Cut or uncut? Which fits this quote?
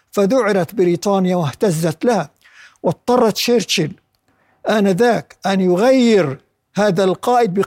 uncut